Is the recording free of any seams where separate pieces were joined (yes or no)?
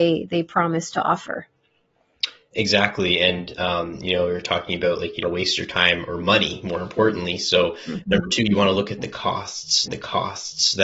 no